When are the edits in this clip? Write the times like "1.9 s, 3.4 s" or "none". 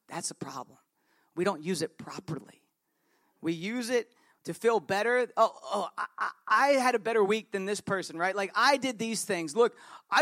none